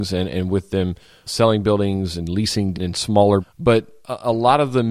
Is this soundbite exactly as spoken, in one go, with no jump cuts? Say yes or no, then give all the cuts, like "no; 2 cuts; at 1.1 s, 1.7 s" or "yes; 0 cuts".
no; 3 cuts; at 1.3 s, 2.7 s, 3.4 s